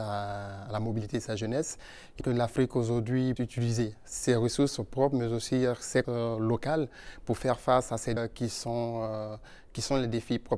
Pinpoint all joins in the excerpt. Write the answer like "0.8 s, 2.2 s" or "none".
2.2 s, 3.4 s, 6.0 s, 8.2 s